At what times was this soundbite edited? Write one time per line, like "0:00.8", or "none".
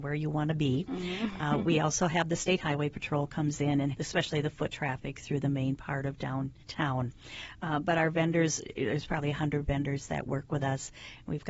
0:03.9
0:06.6